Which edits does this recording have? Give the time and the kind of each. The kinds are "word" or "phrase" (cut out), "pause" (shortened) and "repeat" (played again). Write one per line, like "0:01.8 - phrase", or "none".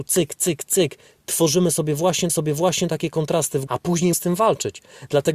0:02.3 - repeat
0:03.7 - word
0:04.1 - word

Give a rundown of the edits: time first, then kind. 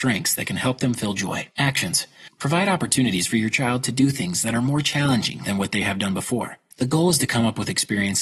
0:01.5 - pause

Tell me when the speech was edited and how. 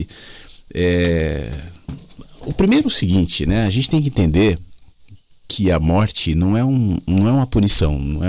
none

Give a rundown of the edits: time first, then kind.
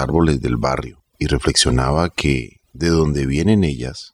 0:01.1 - pause
0:02.6 - pause

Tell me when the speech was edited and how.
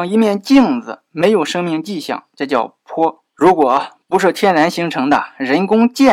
0:03.3 - pause

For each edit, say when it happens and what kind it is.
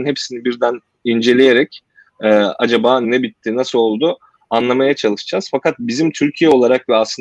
0:03.0 - word

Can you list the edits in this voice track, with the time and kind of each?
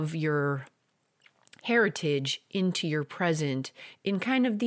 none

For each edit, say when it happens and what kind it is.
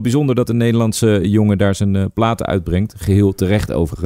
none

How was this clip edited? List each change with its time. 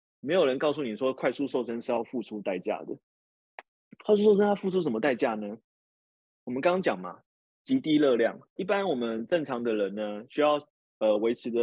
0:03.8 - pause
0:08.6 - word

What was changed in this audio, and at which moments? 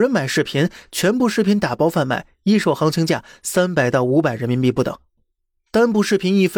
none

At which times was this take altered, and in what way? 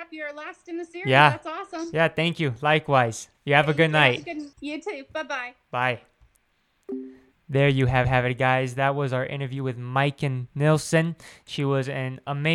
0:03.3 - pause
0:04.5 - pause
0:07.3 - pause
0:08.0 - repeat

